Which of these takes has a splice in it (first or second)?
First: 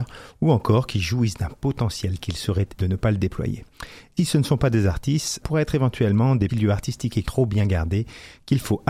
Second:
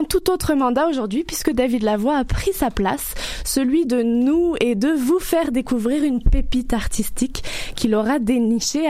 first